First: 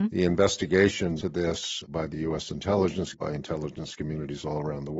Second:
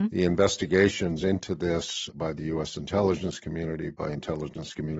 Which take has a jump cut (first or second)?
first